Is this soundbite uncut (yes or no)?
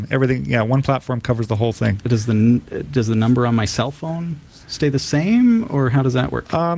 no